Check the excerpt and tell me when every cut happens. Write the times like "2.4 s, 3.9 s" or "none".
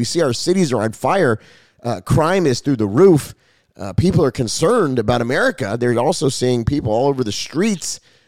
none